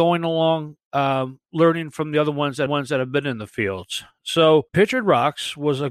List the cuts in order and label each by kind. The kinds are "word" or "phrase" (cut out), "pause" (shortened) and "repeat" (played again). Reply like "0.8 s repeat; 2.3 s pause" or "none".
2.7 s repeat; 4.7 s pause